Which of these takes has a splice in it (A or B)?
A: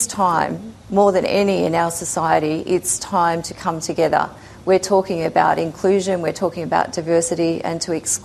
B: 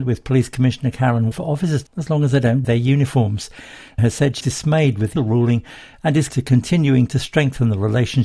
B